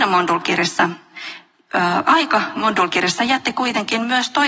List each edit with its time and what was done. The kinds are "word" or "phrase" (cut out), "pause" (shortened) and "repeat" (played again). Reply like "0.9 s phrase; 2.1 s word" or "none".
none

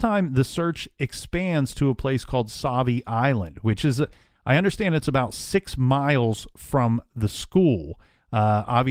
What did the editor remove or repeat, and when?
none

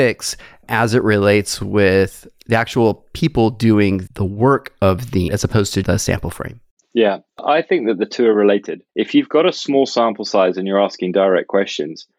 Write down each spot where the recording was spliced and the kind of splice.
4.1 s word; 5.3 s word; 5.8 s word; 6.8 s pause; 8.9 s pause

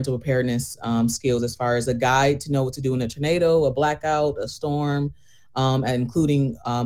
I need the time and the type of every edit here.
none

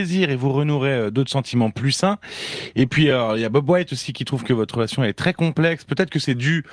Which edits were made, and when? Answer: none

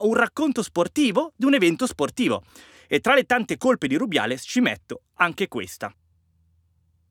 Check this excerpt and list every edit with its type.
none

